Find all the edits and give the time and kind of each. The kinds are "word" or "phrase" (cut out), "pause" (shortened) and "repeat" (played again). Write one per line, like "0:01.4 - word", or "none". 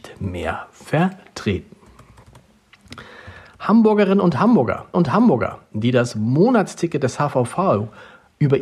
0:04.9 - repeat